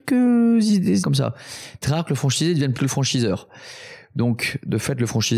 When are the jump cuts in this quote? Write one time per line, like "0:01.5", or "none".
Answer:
0:01.0
0:01.8
0:02.8

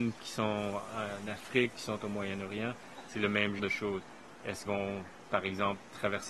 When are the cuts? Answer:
0:01.7
0:03.6
0:04.7

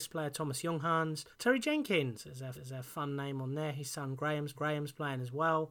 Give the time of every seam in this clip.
0:01.3
0:02.5
0:04.5

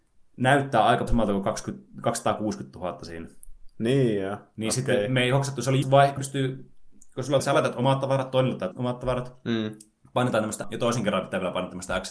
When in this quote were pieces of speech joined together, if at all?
0:01.1
0:05.8
0:06.2
0:07.4
0:08.7
0:10.6

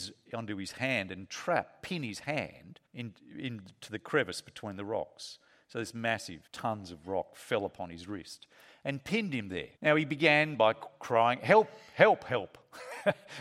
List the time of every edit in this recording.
0:02.9
0:06.5
0:09.8

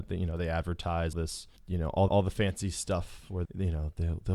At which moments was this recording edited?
0:01.1
0:01.6
0:02.1
0:03.5

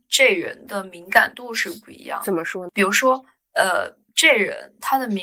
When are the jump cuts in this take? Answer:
0:04.1

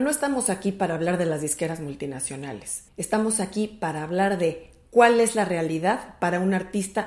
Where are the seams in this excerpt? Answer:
0:02.9

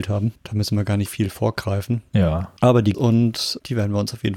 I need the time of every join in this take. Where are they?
0:01.1
0:02.6
0:02.9

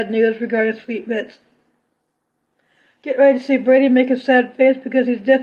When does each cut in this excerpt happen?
none

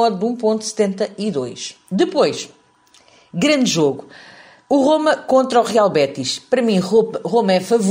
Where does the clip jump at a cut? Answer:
none

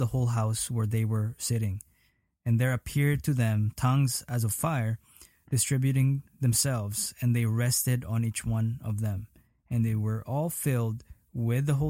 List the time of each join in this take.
none

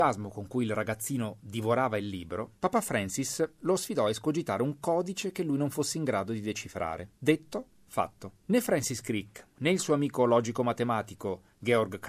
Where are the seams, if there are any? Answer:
0:02.6
0:07.1
0:08.4

